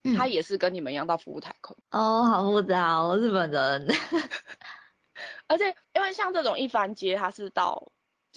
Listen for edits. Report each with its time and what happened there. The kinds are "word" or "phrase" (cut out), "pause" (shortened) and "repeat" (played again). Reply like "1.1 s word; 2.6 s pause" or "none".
1.8 s pause; 5.8 s pause